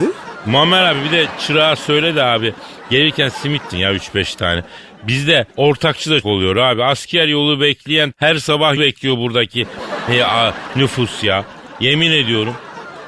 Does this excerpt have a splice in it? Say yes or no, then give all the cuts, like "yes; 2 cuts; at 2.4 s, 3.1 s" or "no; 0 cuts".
yes; 5 cuts; at 3.7 s, 5.5 s, 6.2 s, 8.1 s, 8.8 s